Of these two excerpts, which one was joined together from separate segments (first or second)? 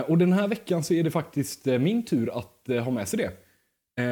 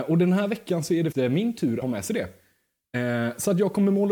second